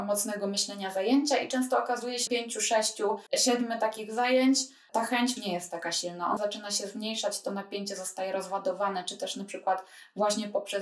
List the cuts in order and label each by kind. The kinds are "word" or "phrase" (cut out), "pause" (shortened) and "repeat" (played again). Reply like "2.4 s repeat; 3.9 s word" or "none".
2.3 s phrase; 3.3 s pause; 5.4 s phrase; 6.4 s word